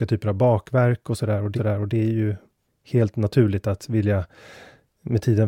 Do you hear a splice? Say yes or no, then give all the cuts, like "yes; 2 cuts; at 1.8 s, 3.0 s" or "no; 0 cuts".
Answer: yes; 2 cuts; at 1.6 s, 2.7 s